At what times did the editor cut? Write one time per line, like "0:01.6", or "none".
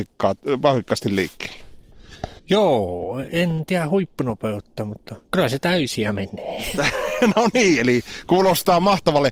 0:02.4